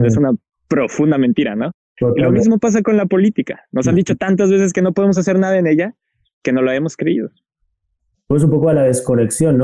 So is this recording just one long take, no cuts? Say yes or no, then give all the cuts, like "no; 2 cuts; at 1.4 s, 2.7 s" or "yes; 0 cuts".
yes; 0 cuts